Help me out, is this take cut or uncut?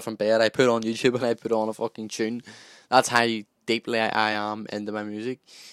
uncut